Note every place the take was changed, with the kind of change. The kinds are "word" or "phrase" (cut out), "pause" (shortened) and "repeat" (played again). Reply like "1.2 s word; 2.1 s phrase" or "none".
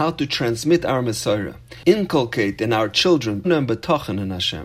1.8 s word; 3.4 s word